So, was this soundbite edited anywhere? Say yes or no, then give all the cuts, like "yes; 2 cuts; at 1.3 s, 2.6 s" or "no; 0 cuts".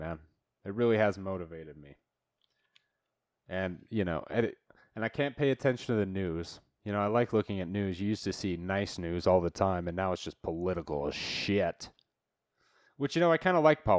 no; 0 cuts